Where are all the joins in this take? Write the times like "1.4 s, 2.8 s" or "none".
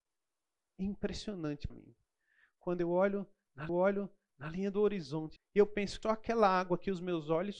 1.7 s, 3.7 s, 5.4 s, 6.0 s